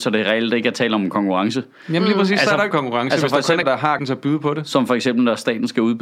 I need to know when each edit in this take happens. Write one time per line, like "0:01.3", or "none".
0:02.7
0:03.6
0:04.0